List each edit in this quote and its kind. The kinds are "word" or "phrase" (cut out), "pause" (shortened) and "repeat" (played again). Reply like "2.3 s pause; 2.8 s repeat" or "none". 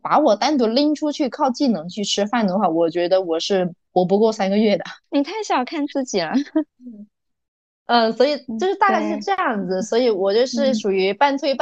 5.0 s pause; 6.7 s pause